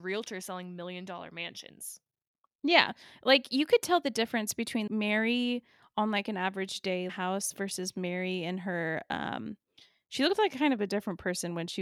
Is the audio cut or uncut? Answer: cut